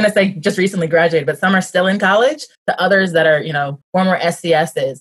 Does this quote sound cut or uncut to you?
cut